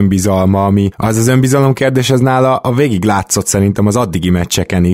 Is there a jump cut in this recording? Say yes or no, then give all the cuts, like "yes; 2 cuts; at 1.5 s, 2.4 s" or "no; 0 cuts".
no; 0 cuts